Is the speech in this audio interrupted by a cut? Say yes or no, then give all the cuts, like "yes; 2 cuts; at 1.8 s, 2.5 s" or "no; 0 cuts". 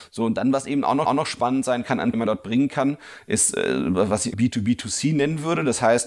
yes; 3 cuts; at 1.1 s, 2.1 s, 4.3 s